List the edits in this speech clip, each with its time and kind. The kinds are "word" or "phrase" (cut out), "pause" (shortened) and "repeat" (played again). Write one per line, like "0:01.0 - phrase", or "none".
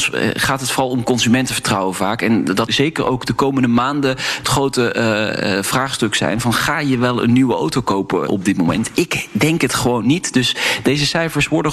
0:02.7 - phrase
0:04.4 - phrase
0:08.3 - word